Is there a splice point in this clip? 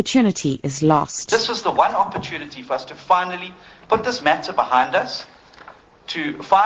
no; 0 cuts

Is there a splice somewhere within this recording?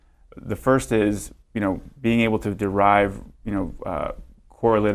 yes; 1 cut; at 1.4 s

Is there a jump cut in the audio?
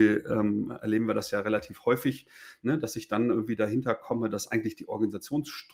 no; 0 cuts

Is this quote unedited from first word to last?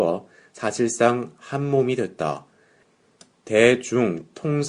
yes; 0 cuts

